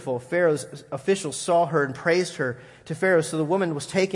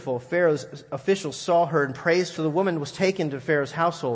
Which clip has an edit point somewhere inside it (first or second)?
second